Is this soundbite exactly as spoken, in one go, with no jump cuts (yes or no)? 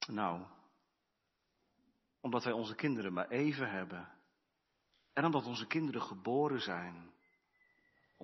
yes